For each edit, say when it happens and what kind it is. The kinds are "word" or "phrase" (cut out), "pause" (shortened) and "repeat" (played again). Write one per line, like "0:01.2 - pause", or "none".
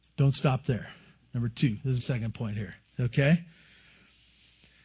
0:02.0 - word